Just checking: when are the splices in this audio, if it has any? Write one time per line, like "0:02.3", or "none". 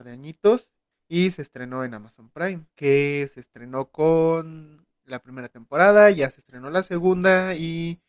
0:00.9
0:02.7
0:04.9